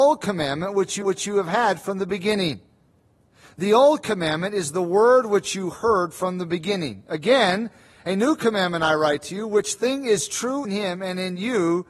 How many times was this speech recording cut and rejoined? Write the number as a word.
two